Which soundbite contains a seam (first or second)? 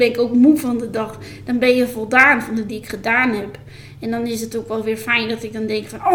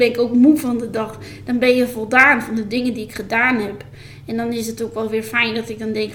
first